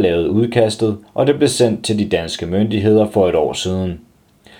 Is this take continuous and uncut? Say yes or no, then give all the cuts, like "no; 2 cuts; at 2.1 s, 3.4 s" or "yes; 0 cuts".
yes; 0 cuts